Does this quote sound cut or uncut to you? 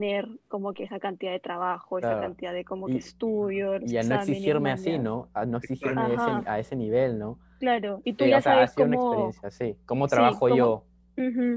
uncut